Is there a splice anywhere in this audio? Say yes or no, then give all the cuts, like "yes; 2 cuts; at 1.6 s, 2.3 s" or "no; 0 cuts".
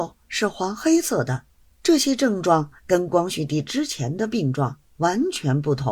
yes; 3 cuts; at 1.6 s, 2.8 s, 4.9 s